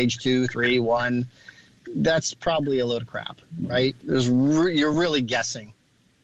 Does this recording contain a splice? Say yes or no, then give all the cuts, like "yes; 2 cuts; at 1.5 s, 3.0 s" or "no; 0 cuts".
no; 0 cuts